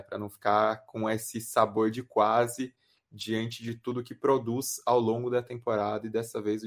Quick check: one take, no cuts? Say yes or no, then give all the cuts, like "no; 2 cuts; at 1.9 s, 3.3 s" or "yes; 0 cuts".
yes; 0 cuts